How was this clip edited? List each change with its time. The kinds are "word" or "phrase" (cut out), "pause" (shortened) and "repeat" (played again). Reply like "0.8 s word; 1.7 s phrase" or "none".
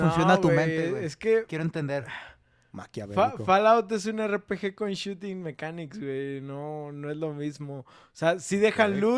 none